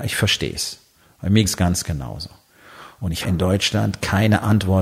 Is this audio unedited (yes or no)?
no